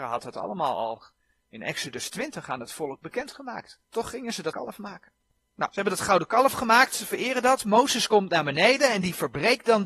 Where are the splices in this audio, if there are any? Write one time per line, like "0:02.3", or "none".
0:03.8
0:04.5
0:05.7